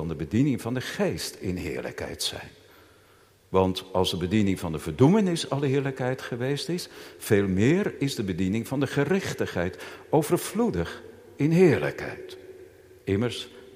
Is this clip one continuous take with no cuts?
yes; 0 cuts

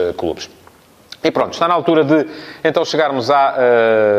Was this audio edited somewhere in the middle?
no; 0 cuts

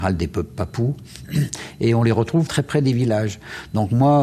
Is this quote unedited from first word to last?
no; 1 cut; at 2.5 s

